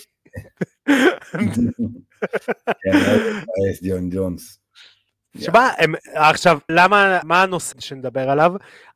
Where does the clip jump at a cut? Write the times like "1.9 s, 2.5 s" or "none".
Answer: 6.7 s, 7.2 s, 7.7 s